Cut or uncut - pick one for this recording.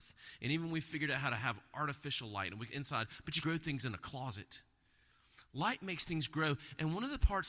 cut